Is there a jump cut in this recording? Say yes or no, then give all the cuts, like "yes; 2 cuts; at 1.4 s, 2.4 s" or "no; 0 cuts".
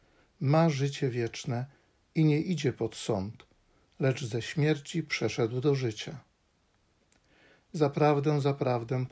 no; 0 cuts